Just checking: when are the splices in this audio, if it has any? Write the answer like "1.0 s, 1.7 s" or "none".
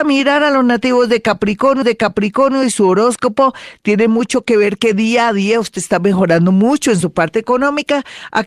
1.8 s

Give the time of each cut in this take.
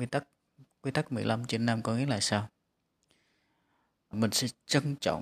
4.1 s

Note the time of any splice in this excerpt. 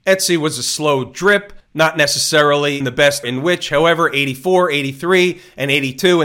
2.8 s, 3.2 s

